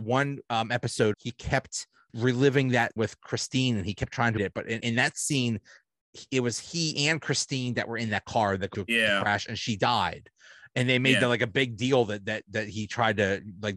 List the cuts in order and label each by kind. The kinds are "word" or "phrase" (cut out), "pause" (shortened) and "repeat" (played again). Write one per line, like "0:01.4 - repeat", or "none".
0:01.1 - word
0:02.1 - word
0:03.0 - word
0:04.4 - word
0:04.8 - word
0:08.7 - word